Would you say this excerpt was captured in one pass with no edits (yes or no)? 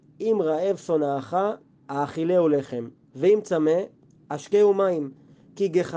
yes